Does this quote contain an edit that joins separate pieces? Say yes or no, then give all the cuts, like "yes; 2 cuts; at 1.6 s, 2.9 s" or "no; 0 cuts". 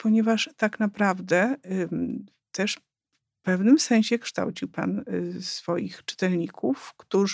no; 0 cuts